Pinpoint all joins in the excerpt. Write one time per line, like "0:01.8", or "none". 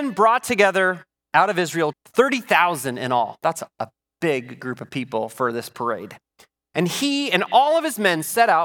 0:01.9